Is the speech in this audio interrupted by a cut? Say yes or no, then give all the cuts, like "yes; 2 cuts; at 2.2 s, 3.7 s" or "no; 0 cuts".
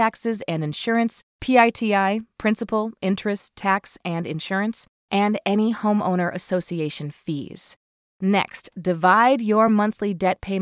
no; 0 cuts